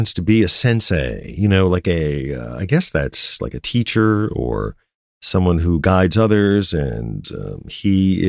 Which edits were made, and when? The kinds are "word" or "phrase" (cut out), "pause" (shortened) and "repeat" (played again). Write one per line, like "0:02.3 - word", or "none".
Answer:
0:03.4 - word

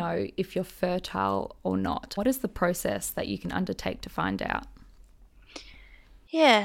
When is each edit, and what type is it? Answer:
0:02.2 - word

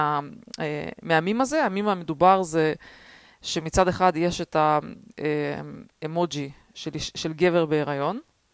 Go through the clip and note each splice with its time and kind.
none

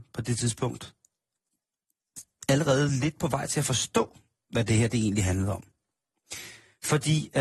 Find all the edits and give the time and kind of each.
none

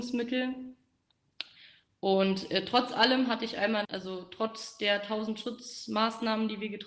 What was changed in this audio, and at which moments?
0:03.8 - phrase

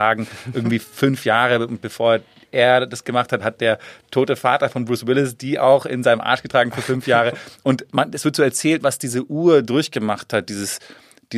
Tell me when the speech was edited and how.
none

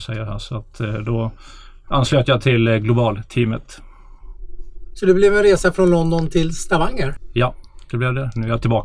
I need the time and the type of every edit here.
none

